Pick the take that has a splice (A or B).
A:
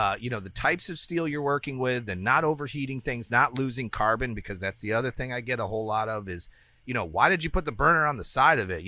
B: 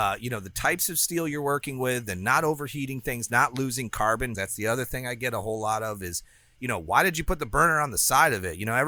B